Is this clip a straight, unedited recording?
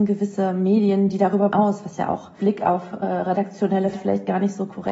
no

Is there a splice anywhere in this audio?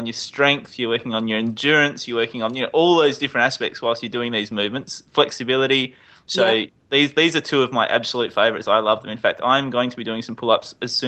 no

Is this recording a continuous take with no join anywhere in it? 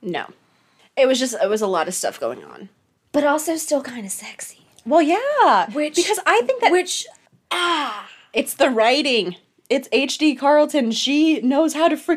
yes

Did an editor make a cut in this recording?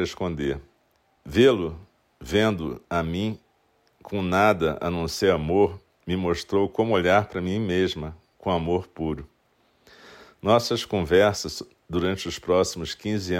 yes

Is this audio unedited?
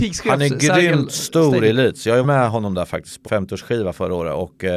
no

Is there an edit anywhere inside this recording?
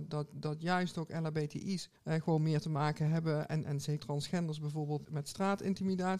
yes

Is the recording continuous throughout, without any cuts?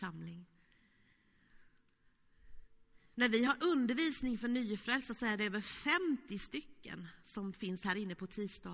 yes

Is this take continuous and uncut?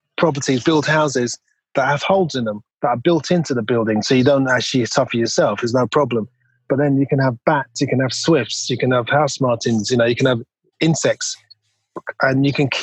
no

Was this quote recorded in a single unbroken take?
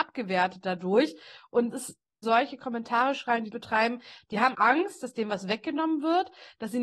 no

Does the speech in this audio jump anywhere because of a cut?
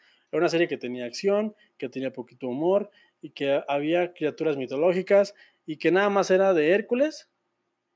no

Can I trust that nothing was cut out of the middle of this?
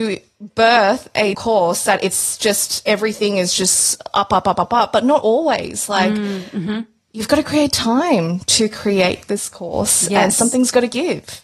no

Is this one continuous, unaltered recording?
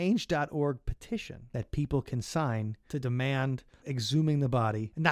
yes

